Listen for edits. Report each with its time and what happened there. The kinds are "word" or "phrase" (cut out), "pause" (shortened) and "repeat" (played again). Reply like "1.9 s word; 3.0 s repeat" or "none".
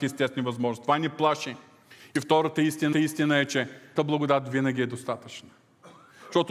2.9 s repeat; 4.0 s word